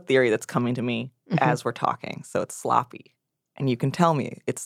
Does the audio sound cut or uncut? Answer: uncut